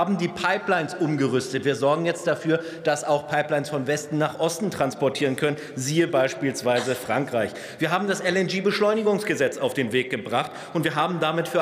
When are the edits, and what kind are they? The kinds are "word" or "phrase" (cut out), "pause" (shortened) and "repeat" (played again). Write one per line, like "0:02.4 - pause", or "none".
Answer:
none